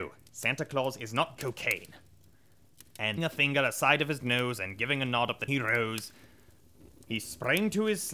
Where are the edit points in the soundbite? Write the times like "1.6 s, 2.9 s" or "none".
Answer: 1.4 s, 3.2 s, 5.5 s